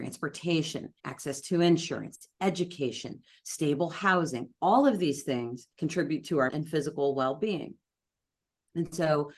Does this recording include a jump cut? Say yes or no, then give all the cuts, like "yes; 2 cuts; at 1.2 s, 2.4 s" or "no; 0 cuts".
yes; 3 cuts; at 1.0 s, 5.7 s, 6.5 s